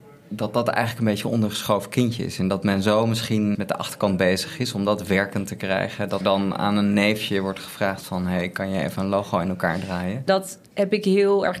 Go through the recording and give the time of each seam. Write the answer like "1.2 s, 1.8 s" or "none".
3.5 s, 6.2 s, 10.7 s